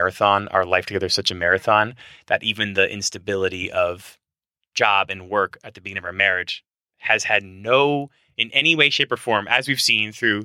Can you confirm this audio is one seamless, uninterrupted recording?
yes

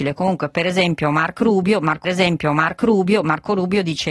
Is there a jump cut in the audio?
yes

